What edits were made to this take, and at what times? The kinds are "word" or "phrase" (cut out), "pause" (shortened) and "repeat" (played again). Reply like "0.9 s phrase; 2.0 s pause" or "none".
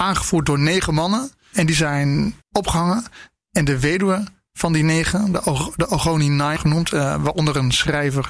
2.4 s pause; 6.6 s word